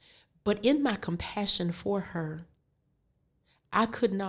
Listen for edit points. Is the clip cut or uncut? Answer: uncut